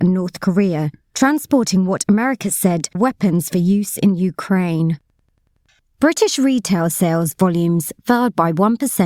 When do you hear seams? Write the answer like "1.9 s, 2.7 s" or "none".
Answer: 2.9 s